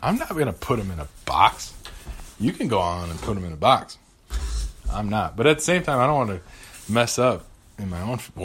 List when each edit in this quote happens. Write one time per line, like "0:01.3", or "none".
none